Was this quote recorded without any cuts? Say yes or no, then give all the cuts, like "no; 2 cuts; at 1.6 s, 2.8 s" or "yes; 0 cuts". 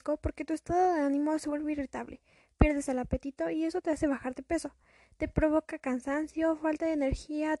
yes; 0 cuts